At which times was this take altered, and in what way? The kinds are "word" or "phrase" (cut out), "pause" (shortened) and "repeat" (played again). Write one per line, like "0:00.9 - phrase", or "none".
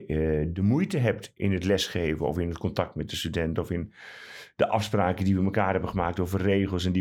none